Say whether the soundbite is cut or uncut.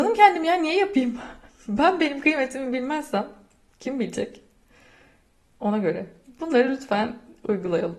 uncut